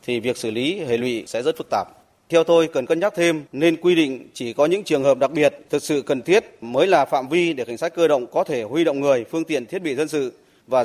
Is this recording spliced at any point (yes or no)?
no